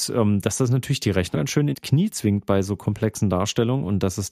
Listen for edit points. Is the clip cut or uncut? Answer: cut